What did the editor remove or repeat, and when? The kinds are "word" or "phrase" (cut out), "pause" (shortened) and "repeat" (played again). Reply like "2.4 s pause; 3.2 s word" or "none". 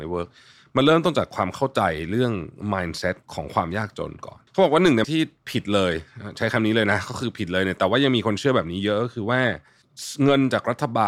3.2 s pause; 4.5 s pause; 5.0 s word